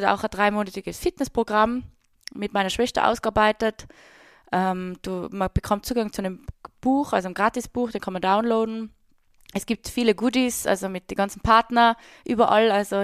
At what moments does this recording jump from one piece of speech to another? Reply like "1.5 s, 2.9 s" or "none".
none